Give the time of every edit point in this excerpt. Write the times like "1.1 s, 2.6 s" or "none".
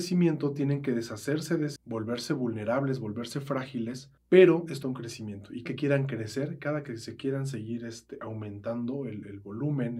1.8 s, 4.2 s, 4.8 s, 5.7 s